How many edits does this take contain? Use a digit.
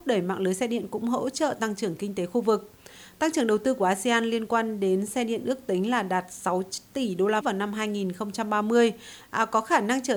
1